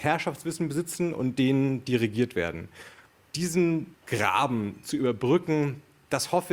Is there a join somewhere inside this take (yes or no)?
no